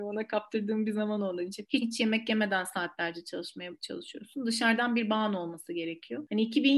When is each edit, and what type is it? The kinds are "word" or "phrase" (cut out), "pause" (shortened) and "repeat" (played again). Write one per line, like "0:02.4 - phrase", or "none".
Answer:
0:01.8 - word

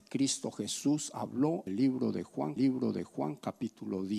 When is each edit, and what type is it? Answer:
0:01.7 - word
0:02.6 - repeat

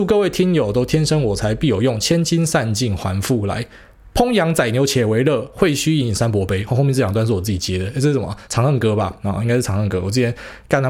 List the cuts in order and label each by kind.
0:08.5 - pause

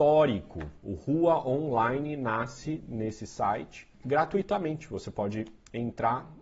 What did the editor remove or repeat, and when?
none

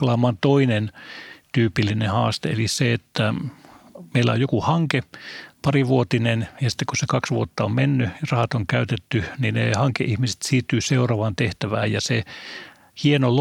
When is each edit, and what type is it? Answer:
none

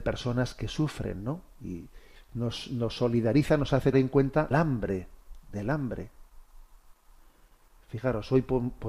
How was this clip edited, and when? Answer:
0:02.2 - pause
0:03.9 - word
0:04.5 - phrase

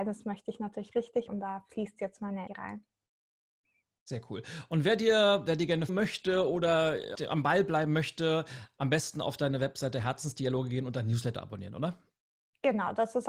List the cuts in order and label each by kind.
0:01.3 - word
0:02.5 - word
0:05.9 - word
0:07.1 - word

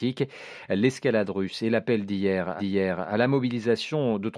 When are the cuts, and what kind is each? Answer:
0:02.6 - repeat

